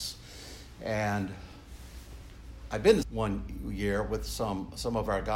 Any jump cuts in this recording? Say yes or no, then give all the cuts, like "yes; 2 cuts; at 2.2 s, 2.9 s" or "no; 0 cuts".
yes; 1 cut; at 3.0 s